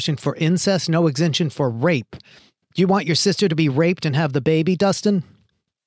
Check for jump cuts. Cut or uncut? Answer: uncut